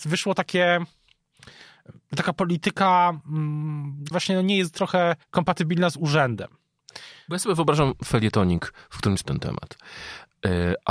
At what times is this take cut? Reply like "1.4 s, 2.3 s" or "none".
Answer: 4.1 s, 5.2 s, 9.2 s

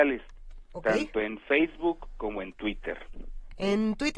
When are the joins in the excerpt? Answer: none

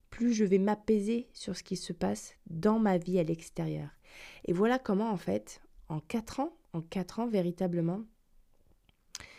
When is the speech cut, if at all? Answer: 6.6 s

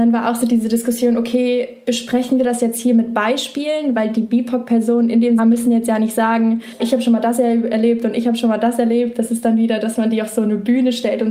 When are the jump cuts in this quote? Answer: 5.4 s, 6.8 s

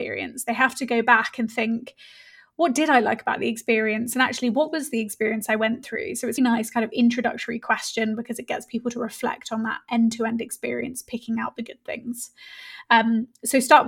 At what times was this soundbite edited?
6.4 s

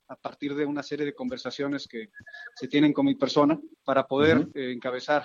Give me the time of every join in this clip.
3.7 s

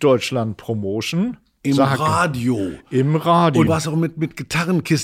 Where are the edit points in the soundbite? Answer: 3.7 s

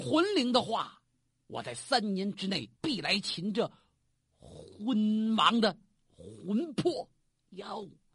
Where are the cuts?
2.8 s

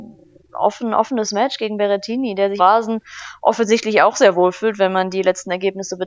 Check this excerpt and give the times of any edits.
2.6 s

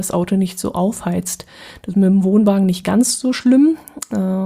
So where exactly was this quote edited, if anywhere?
none

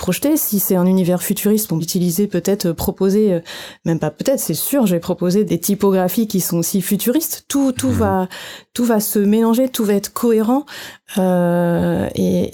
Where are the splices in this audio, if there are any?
1.8 s, 5.5 s

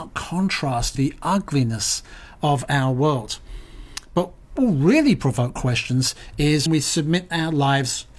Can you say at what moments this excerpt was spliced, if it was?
0.9 s, 4.6 s, 6.7 s

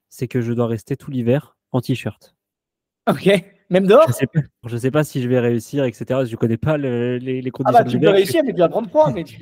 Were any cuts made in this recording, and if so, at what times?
4.6 s

